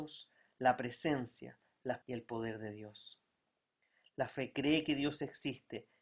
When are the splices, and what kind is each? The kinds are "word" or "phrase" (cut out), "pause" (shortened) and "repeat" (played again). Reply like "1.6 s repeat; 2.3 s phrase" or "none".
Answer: 2.0 s word